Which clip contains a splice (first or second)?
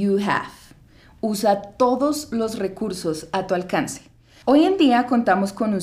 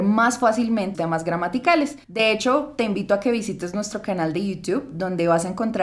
second